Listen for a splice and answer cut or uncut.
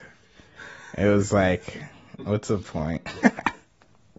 uncut